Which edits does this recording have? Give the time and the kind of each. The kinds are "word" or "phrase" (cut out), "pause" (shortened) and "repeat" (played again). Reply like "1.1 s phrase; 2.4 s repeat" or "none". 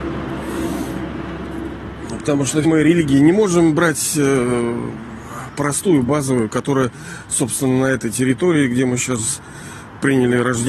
2.6 s word; 5.5 s word